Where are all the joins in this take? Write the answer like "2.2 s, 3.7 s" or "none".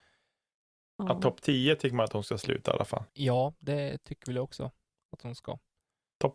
3.1 s